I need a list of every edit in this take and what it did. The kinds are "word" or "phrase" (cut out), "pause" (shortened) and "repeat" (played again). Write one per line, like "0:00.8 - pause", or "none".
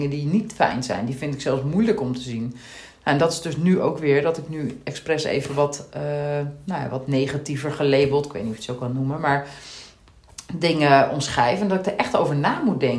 none